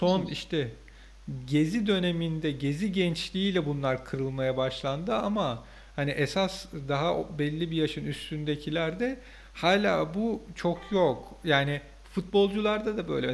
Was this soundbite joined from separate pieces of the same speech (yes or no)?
no